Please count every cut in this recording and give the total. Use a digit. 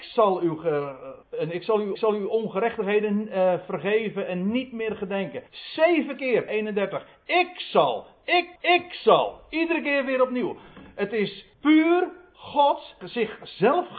7